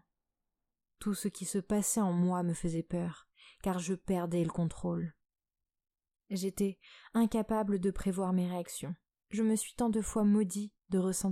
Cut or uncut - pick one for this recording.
cut